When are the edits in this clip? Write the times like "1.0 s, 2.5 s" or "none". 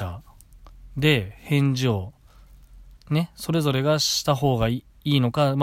3.0 s